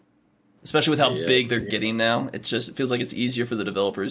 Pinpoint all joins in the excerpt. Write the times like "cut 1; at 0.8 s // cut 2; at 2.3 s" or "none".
none